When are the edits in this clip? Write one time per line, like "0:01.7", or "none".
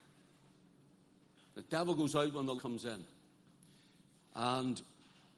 0:02.6